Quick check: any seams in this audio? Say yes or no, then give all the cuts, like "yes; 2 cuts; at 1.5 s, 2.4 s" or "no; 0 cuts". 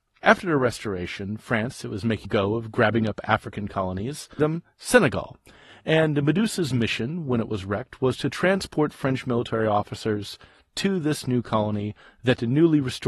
yes; 2 cuts; at 2.2 s, 4.4 s